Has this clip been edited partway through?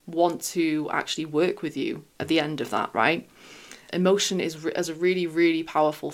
yes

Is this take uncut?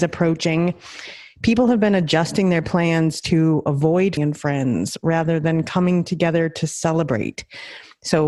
no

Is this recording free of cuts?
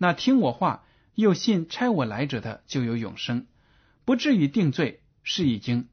yes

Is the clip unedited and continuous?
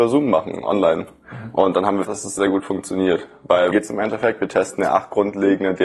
no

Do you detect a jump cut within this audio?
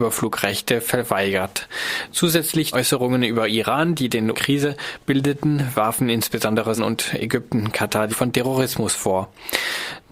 yes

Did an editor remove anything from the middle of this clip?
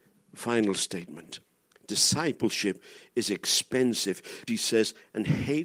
yes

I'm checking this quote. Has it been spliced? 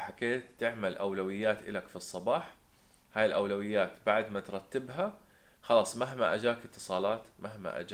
no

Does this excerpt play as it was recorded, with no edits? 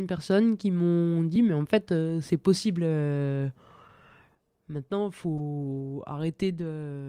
yes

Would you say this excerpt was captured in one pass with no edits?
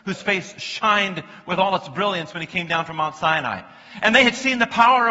yes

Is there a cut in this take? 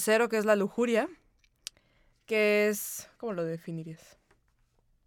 no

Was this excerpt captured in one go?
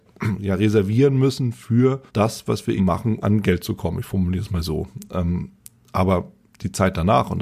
no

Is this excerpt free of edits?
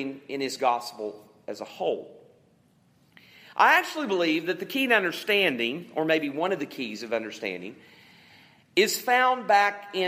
yes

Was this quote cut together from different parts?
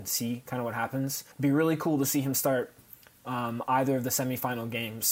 yes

